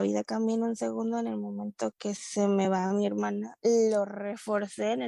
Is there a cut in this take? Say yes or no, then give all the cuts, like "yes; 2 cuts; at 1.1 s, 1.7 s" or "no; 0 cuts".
no; 0 cuts